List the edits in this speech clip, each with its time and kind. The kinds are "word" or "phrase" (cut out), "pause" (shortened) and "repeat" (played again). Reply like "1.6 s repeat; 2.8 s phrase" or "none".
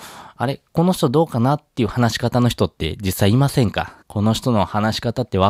4.0 s pause